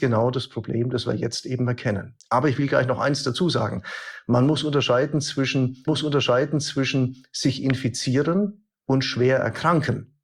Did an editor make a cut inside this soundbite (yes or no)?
yes